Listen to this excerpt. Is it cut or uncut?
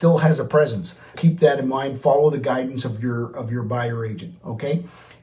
cut